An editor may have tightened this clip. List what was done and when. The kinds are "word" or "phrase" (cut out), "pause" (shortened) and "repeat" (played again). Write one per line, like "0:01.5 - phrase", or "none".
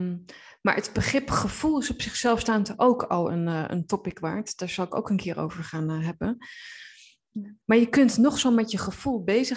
0:07.6 - pause